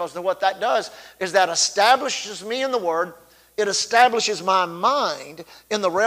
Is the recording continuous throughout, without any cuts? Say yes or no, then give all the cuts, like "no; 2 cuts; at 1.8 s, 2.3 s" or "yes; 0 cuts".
yes; 0 cuts